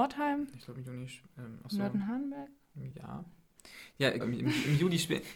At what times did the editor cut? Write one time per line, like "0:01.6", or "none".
0:02.9
0:04.2